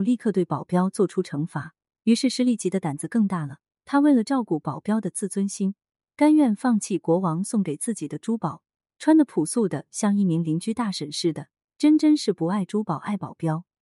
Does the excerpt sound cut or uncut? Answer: uncut